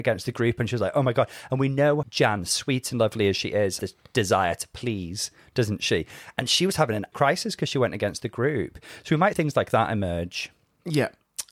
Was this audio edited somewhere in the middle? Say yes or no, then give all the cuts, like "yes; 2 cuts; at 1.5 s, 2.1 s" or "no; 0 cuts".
yes; 4 cuts; at 2.0 s, 3.8 s, 7.1 s, 9.3 s